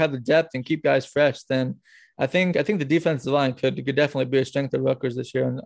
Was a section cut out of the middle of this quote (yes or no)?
no